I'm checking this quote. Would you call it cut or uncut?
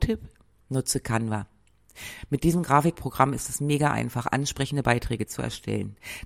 uncut